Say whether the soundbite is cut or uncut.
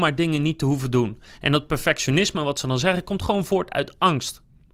uncut